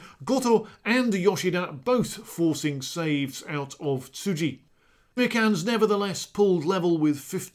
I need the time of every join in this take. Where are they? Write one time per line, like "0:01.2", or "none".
0:05.2